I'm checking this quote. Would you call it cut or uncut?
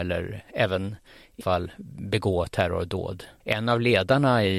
cut